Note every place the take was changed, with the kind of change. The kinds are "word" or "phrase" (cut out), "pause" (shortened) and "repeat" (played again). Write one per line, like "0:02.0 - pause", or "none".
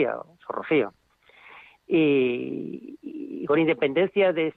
none